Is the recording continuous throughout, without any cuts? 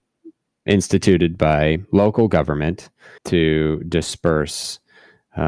no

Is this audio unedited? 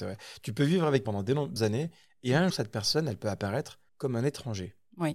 no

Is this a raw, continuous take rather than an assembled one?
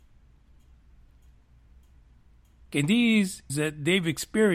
no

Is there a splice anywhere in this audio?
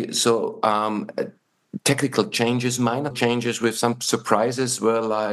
yes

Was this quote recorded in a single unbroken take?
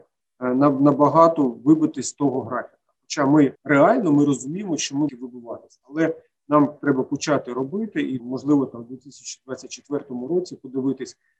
no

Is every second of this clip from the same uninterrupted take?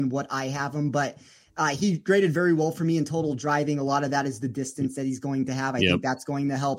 yes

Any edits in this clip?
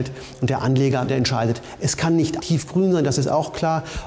yes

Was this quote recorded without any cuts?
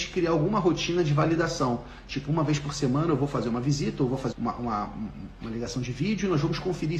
no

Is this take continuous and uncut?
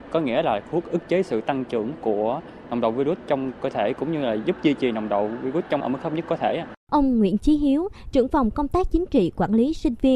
no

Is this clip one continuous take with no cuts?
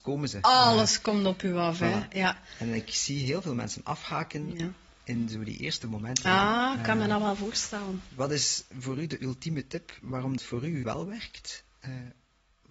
no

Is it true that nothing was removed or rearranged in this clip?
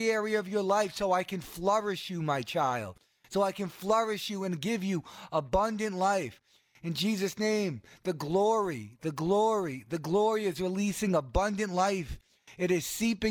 yes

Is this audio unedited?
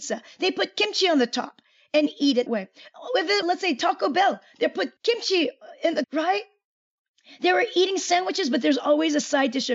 no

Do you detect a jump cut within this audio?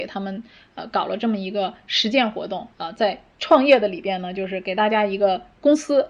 yes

